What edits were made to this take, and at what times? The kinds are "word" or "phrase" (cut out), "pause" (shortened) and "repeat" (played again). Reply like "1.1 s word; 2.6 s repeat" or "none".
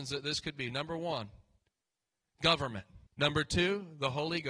3.1 s pause